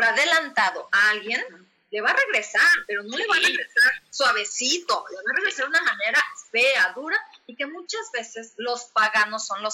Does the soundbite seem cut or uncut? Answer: uncut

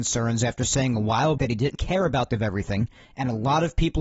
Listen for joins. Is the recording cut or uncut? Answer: cut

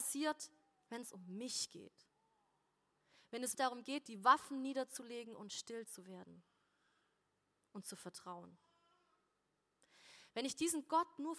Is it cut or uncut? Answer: cut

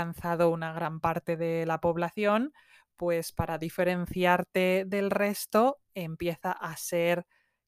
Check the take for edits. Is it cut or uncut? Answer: uncut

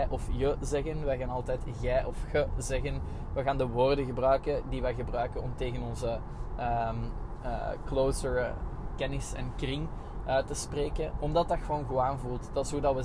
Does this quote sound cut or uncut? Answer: uncut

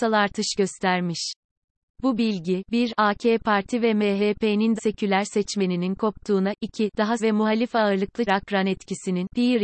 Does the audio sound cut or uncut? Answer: cut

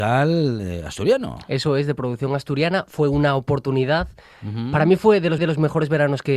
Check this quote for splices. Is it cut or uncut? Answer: cut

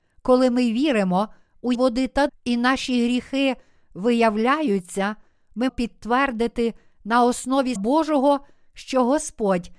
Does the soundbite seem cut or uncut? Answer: cut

